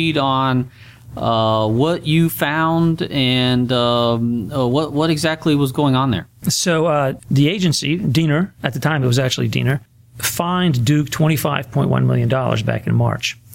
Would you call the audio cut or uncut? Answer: uncut